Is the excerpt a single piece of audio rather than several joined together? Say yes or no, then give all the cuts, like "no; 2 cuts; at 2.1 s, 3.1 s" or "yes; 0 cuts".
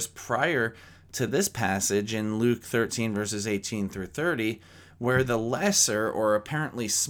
yes; 0 cuts